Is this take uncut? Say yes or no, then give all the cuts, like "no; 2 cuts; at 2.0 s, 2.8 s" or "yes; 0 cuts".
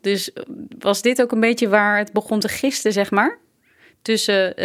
yes; 0 cuts